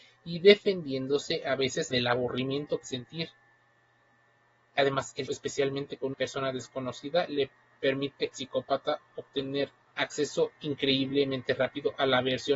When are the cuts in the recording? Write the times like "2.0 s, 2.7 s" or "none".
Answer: 1.9 s, 2.8 s, 5.3 s, 6.1 s, 8.3 s, 9.9 s